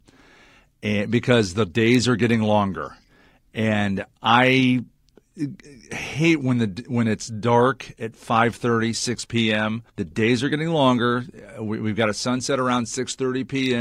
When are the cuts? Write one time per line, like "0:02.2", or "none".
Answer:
0:04.1
0:09.9